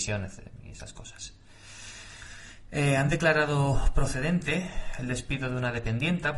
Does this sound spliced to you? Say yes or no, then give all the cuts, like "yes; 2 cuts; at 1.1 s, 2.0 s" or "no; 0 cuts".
no; 0 cuts